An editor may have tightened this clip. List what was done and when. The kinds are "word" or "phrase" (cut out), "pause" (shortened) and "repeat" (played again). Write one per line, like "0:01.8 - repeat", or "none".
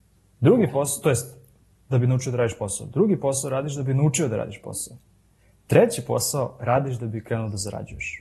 none